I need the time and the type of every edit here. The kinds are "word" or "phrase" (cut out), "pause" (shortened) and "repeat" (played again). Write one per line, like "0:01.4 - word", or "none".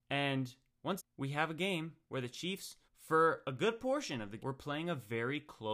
0:01.0 - word
0:02.9 - pause
0:04.4 - word